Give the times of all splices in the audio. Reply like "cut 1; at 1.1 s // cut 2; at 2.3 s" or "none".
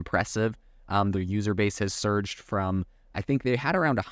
none